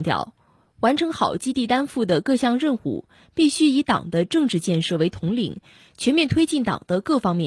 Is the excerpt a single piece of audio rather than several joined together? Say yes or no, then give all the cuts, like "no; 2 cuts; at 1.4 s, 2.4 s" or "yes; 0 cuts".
yes; 0 cuts